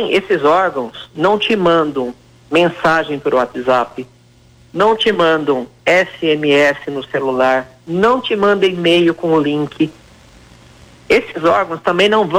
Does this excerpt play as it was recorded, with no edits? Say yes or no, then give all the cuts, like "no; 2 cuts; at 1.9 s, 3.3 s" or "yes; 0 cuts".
yes; 0 cuts